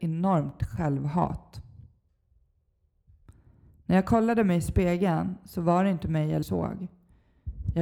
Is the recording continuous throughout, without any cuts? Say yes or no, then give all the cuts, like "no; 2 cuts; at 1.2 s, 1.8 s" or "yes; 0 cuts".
no; 1 cut; at 6.4 s